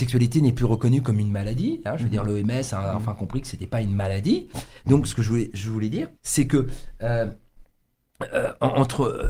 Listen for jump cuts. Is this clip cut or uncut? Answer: cut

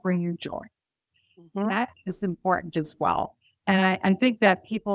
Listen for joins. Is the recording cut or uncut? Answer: uncut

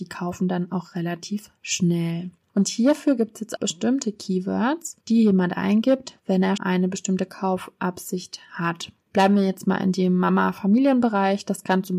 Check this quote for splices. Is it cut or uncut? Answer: cut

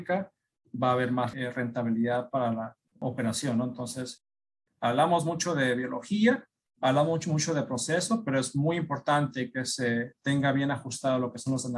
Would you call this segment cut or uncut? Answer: uncut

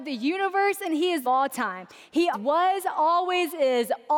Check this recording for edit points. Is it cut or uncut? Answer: cut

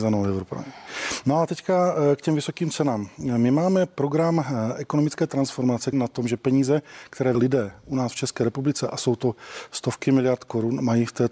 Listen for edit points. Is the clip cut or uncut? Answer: cut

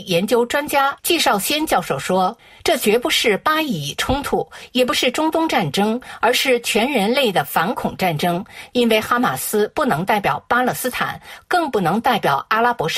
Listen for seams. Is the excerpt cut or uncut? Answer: uncut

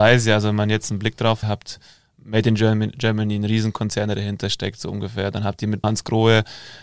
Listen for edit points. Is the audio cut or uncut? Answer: cut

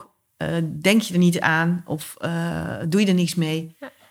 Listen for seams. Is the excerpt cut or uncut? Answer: uncut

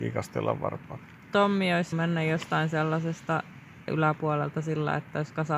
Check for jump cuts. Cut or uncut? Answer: cut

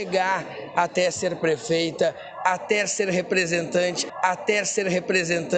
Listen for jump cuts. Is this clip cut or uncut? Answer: cut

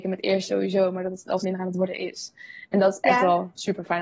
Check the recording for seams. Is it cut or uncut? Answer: cut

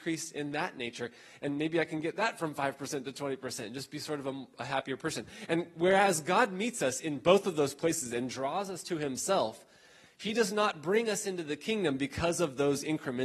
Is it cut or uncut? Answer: uncut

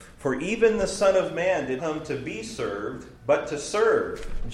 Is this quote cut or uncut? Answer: cut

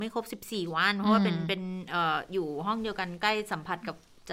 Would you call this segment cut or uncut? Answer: uncut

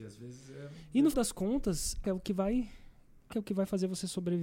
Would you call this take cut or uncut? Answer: cut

